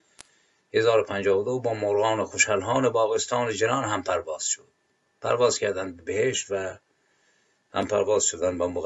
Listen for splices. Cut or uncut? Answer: uncut